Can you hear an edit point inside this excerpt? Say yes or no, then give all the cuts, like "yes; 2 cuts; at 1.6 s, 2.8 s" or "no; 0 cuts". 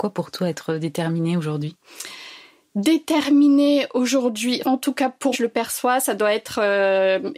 yes; 2 cuts; at 4.6 s, 5.3 s